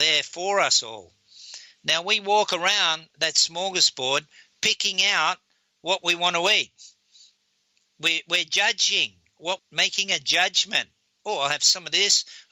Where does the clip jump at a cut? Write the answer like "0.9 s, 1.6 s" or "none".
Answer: 9.6 s